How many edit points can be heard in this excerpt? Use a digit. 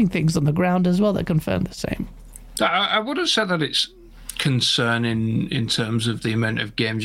0